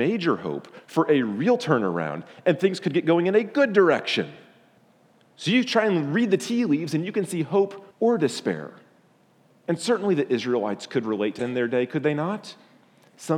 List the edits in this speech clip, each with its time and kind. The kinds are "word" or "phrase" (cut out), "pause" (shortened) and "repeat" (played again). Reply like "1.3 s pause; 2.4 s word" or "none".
4.8 s pause; 7.9 s pause; 11.4 s word